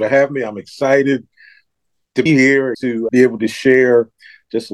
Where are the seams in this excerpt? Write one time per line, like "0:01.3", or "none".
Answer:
0:02.3
0:02.7
0:03.1